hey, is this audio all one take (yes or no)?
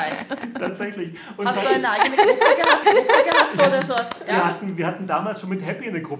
no